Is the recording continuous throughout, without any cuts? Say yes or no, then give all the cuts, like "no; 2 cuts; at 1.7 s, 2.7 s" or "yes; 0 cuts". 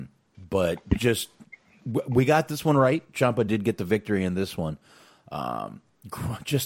yes; 0 cuts